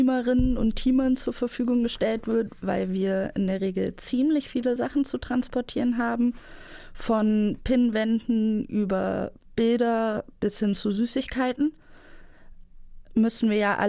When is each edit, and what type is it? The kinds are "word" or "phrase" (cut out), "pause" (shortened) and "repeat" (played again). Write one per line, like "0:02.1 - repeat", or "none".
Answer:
none